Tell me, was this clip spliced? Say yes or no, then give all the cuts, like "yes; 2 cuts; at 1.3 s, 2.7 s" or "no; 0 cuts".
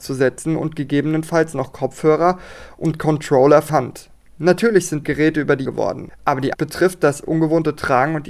yes; 4 cuts; at 3.7 s, 5.0 s, 5.7 s, 6.5 s